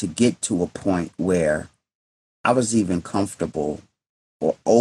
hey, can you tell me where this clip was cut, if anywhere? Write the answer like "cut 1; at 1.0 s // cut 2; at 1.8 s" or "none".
none